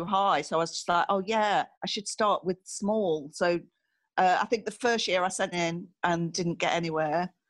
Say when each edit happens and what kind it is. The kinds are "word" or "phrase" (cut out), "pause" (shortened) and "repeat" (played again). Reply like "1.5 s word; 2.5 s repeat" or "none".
1.7 s pause; 5.5 s word